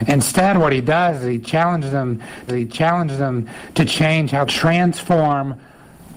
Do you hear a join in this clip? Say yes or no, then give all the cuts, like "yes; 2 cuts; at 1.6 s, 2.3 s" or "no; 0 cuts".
yes; 2 cuts; at 2.5 s, 4.5 s